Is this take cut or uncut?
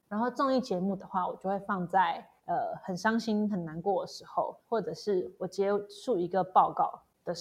cut